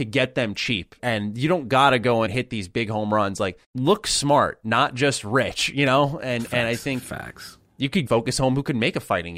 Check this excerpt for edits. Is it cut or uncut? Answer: cut